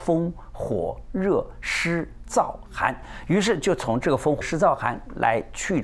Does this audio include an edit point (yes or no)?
yes